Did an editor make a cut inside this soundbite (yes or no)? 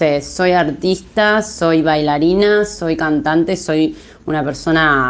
no